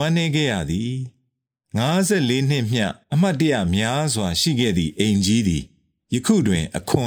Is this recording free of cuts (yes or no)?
no